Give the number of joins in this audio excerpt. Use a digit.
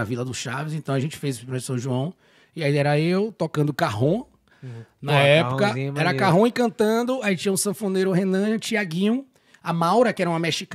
0